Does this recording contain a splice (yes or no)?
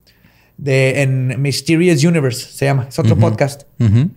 no